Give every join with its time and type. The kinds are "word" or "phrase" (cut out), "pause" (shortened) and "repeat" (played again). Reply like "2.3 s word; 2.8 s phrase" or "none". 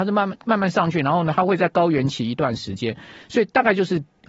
none